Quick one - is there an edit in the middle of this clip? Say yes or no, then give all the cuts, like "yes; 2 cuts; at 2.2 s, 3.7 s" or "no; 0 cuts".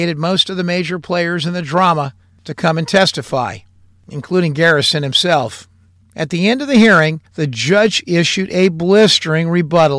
yes; 1 cut; at 7.3 s